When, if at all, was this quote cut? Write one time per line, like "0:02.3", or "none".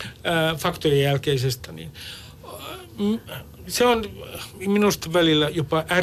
0:01.6